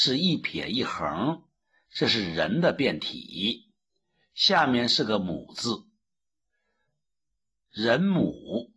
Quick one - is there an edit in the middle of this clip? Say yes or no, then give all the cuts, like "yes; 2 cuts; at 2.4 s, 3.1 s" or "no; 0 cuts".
no; 0 cuts